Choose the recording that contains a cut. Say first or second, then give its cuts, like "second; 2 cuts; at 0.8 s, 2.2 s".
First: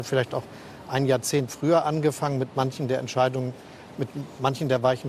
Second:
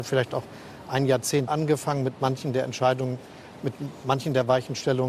second; 1 cut; at 1.5 s